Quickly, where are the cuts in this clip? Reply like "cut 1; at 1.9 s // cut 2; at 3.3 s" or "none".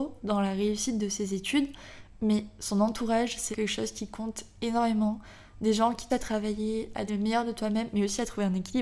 cut 1; at 3.5 s // cut 2; at 6.1 s // cut 3; at 7.1 s

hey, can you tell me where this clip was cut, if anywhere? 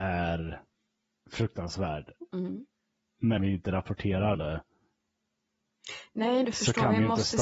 cut 1; at 3.4 s // cut 2; at 4.3 s // cut 3; at 6.4 s

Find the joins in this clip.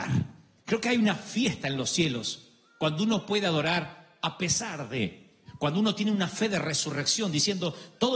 none

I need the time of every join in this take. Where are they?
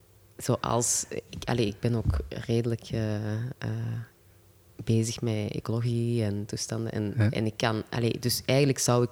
none

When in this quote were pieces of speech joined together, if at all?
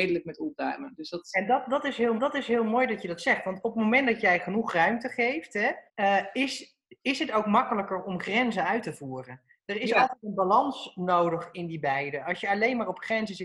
cut 1; at 2.2 s // cut 2; at 5.9 s

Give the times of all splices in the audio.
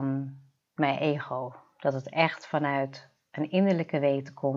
none

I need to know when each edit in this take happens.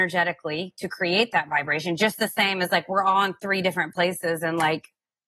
none

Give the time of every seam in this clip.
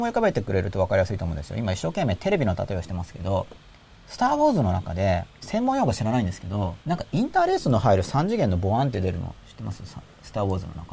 cut 1; at 3.6 s // cut 2; at 5.3 s // cut 3; at 6.8 s

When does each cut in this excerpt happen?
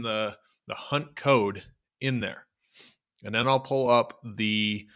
none

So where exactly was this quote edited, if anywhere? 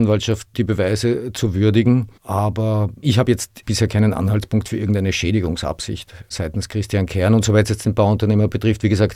cut 1; at 2.2 s

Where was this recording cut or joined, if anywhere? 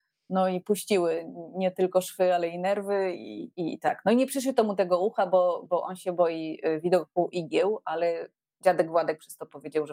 none

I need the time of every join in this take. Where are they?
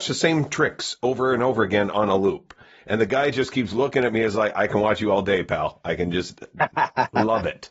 none

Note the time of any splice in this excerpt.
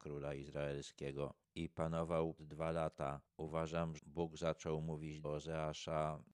cut 1; at 2.4 s // cut 2; at 4.0 s // cut 3; at 5.2 s

